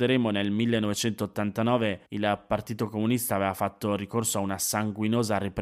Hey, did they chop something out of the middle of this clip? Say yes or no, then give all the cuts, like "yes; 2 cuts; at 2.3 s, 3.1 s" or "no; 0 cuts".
yes; 1 cut; at 2.1 s